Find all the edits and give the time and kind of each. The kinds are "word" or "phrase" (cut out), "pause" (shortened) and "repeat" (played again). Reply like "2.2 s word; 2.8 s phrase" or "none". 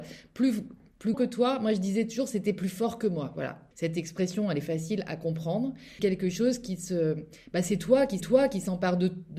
1.1 s word; 3.7 s pause; 6.0 s word; 8.2 s repeat